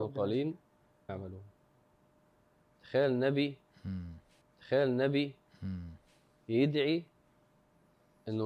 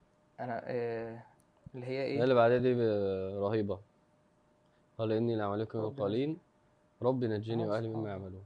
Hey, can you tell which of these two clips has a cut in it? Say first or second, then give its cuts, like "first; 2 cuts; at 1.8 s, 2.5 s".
first; 2 cuts; at 1.1 s, 4.4 s